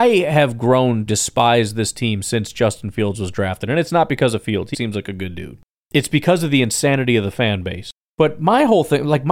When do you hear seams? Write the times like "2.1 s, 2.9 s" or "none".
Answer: 1.1 s, 4.7 s

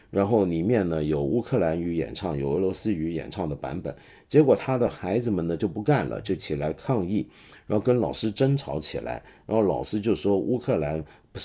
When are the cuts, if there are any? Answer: none

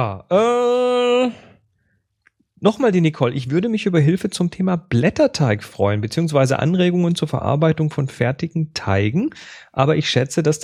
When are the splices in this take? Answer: none

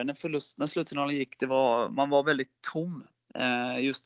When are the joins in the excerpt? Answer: none

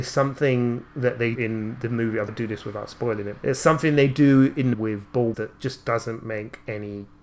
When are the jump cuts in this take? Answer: 1.4 s, 2.3 s, 3.4 s, 4.7 s, 5.3 s

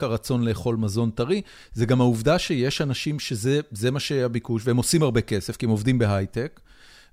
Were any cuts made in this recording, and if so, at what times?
none

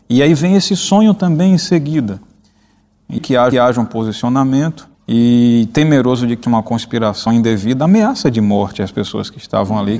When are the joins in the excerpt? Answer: 3.2 s, 3.5 s, 4.9 s, 6.4 s, 7.3 s

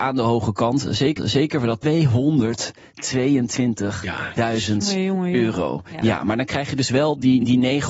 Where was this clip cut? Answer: 1.2 s, 1.8 s

